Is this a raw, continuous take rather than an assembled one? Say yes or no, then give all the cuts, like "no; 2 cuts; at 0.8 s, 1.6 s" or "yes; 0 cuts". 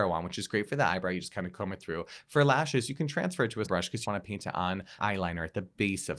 no; 3 cuts; at 3.6 s, 4.0 s, 5.0 s